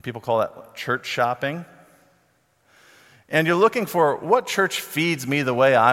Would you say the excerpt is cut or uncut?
uncut